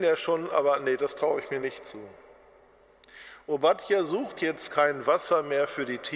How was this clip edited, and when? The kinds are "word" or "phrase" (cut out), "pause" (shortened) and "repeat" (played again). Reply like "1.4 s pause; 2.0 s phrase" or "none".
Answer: none